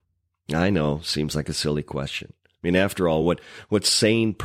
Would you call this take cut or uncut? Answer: uncut